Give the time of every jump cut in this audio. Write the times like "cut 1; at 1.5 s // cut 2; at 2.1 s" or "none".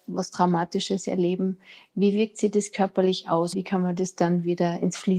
cut 1; at 3.5 s